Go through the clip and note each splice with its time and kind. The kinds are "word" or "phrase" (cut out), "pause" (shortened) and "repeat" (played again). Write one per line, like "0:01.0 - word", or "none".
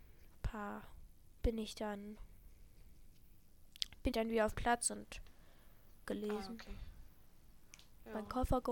0:01.4 - word
0:04.1 - word
0:04.5 - word
0:06.1 - word